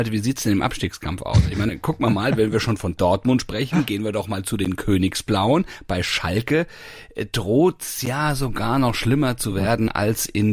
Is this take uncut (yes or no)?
yes